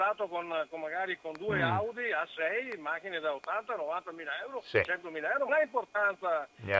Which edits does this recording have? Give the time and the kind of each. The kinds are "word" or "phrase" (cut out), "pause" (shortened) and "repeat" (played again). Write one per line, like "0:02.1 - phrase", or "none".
0:05.5 - word